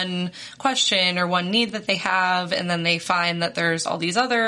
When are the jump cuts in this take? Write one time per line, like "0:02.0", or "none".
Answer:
none